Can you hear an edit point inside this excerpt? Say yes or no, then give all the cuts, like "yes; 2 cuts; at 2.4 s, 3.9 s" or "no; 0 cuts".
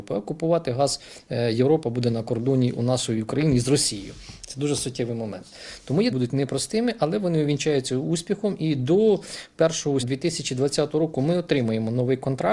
yes; 2 cuts; at 6.1 s, 10.0 s